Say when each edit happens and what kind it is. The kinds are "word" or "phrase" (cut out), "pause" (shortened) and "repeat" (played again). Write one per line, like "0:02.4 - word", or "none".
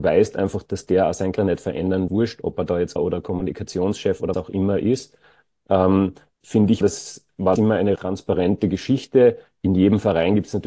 0:01.4 - word
0:02.1 - word
0:03.0 - word
0:04.3 - word
0:06.3 - word
0:06.8 - word
0:07.6 - word
0:08.0 - word